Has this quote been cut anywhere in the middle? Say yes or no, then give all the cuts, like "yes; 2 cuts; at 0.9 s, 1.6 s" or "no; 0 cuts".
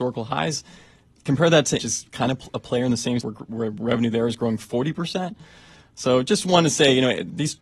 yes; 2 cuts; at 1.8 s, 3.2 s